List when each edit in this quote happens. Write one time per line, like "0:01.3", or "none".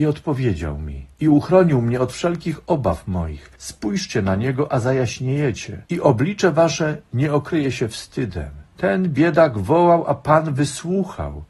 0:01.1
0:03.6
0:05.9
0:08.7